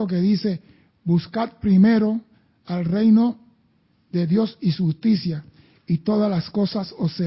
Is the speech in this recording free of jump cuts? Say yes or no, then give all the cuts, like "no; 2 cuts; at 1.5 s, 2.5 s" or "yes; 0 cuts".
yes; 0 cuts